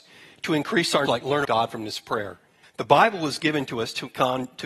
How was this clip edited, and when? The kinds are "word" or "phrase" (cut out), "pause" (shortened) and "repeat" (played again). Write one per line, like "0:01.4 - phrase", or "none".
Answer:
0:01.1 - word
0:01.4 - word
0:02.6 - pause

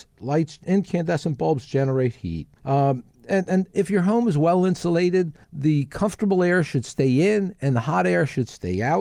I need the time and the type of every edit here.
0:02.6 - pause
0:05.4 - pause

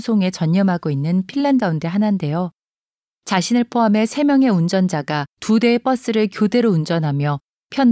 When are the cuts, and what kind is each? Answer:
0:01.6 - word
0:05.3 - pause

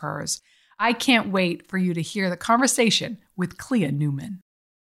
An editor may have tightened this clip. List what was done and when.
none

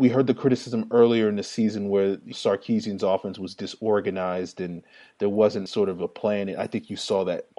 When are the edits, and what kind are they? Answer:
0:02.3 - word
0:05.7 - word

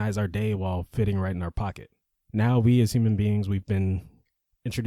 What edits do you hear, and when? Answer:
0:02.0 - pause

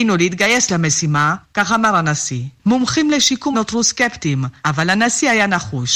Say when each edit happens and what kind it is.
0:03.5 - word

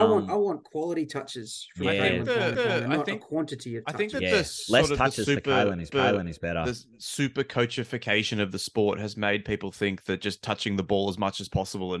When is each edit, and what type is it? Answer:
0:02.5 - repeat
0:05.9 - repeat

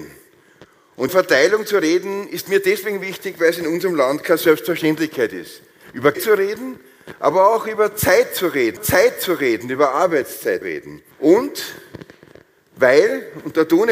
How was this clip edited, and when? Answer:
0:01.1 - word
0:06.1 - word
0:08.8 - repeat
0:10.6 - word
0:11.1 - pause

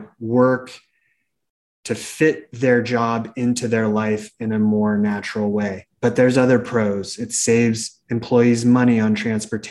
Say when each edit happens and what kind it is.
0:05.9 - pause

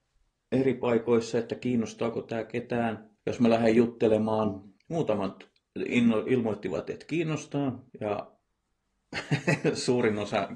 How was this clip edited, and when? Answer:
0:03.2 - pause
0:04.8 - pause
0:07.9 - pause

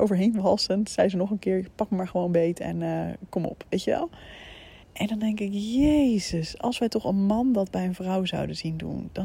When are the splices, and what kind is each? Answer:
0:04.8 - pause

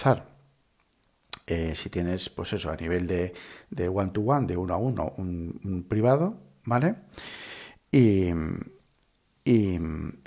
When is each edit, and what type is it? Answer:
none

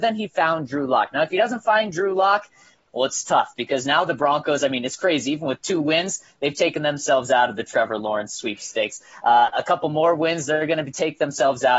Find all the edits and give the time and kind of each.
none

